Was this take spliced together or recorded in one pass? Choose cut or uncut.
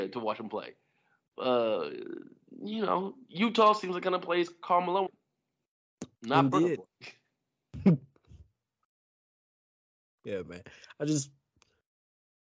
cut